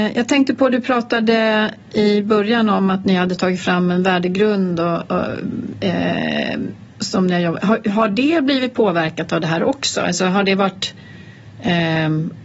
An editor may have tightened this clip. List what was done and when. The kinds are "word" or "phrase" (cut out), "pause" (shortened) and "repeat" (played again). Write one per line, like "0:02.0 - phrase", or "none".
none